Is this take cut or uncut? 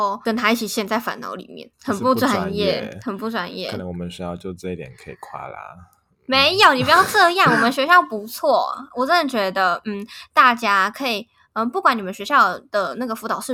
uncut